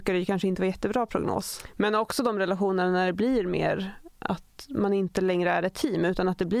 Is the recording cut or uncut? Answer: uncut